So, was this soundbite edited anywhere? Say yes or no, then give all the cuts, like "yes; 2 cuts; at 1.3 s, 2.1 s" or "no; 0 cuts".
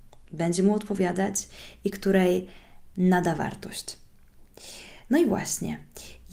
no; 0 cuts